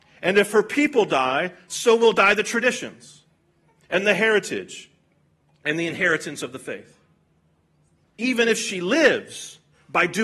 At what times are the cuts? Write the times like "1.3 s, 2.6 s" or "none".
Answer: none